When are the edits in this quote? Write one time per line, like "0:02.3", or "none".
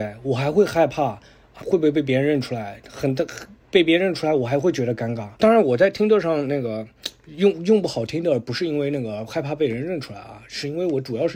0:01.6
0:05.4